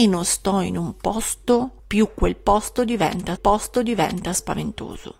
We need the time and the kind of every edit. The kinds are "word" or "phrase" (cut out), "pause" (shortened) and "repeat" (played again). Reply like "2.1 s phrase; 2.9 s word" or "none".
1.8 s pause; 3.4 s repeat